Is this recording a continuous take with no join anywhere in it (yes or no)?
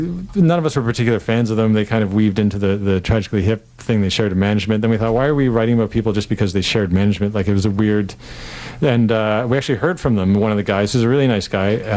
yes